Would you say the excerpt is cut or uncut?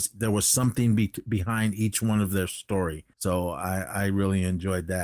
cut